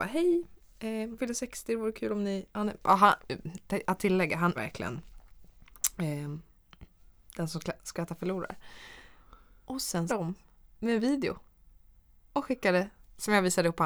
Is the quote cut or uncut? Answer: cut